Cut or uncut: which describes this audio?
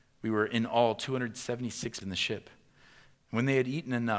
cut